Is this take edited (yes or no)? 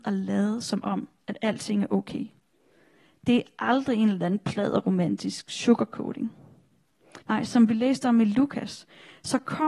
yes